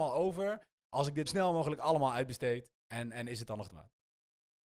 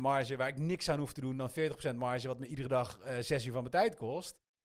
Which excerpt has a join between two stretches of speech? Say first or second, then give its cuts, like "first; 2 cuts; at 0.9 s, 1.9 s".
first; 3 cuts; at 1.3 s, 2.8 s, 3.7 s